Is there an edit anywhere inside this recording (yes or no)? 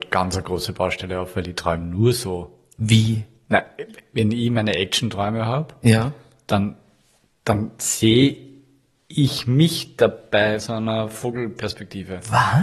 yes